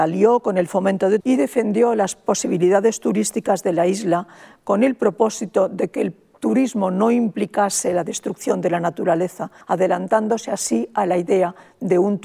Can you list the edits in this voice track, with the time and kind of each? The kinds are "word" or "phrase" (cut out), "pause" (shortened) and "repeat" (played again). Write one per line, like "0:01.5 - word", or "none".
0:01.2 - word
0:09.6 - pause